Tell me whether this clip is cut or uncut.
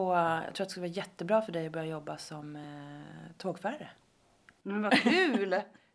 uncut